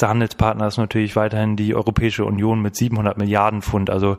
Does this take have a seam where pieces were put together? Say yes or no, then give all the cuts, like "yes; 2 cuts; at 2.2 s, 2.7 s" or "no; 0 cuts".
no; 0 cuts